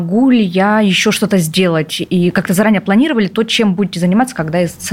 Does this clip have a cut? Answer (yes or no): no